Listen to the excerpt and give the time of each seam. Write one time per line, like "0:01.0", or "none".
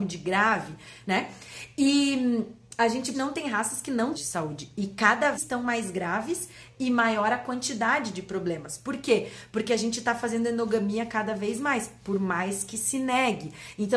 0:03.1
0:04.1
0:05.3

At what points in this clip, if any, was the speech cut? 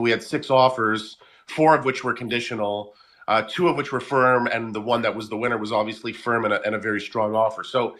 none

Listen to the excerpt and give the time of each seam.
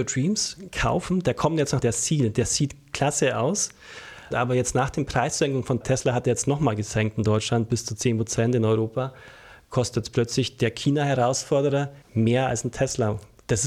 0:01.8
0:04.3
0:05.8
0:12.0

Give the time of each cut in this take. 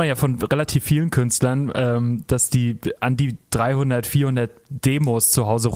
none

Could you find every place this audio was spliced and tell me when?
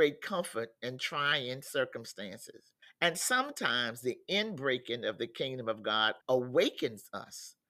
0:02.8
0:06.2

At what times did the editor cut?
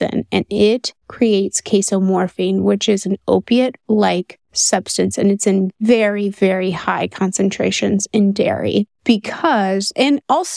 0:01.0
0:04.4
0:09.0

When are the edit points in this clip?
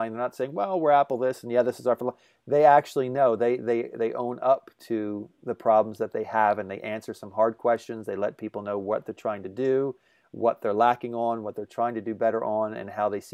none

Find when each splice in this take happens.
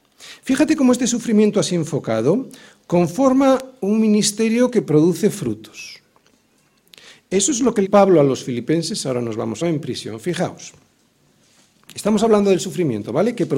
0:07.8
0:09.6

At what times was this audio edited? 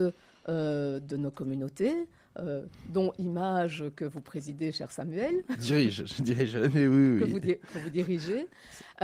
none

